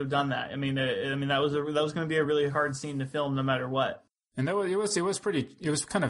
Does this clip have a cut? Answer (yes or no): no